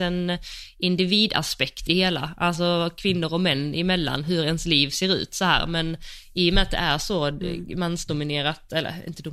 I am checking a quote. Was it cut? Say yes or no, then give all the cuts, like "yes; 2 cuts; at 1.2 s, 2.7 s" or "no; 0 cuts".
yes; 1 cut; at 1.9 s